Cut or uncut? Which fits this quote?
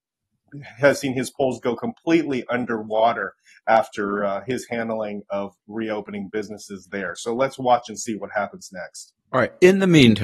uncut